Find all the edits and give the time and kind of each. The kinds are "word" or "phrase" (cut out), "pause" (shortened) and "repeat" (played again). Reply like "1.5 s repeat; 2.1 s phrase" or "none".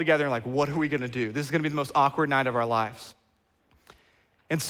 none